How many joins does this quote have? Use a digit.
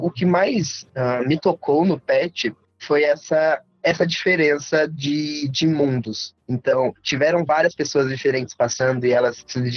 0